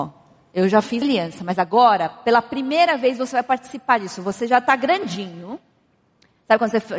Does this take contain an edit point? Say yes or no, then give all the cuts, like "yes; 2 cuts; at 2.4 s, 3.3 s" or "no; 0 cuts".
yes; 1 cut; at 1.0 s